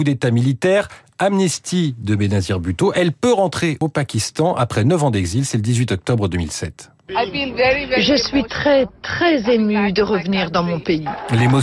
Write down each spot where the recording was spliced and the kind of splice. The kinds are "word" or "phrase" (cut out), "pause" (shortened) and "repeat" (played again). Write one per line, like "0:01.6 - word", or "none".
none